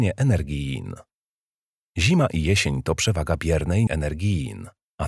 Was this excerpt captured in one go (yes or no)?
no